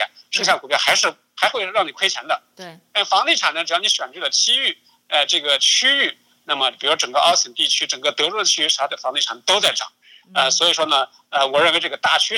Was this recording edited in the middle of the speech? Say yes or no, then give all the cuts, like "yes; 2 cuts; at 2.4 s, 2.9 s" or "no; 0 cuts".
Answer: no; 0 cuts